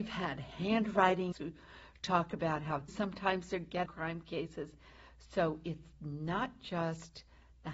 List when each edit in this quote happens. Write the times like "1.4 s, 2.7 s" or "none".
1.3 s, 2.9 s, 3.9 s